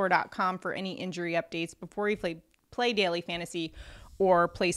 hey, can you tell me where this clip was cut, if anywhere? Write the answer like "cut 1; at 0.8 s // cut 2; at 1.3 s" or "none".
none